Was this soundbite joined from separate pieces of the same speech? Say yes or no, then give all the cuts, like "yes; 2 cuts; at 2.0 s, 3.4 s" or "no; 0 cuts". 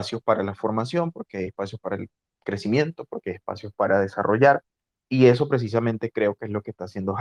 no; 0 cuts